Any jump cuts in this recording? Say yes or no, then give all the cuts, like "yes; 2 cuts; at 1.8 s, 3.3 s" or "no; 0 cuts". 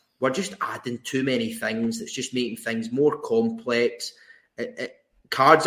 no; 0 cuts